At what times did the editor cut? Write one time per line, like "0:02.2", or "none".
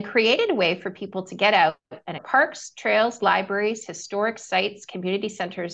0:02.2